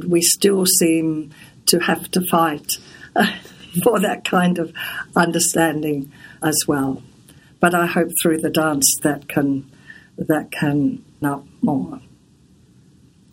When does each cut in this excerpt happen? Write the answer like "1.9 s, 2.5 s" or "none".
6.4 s, 9.0 s, 11.2 s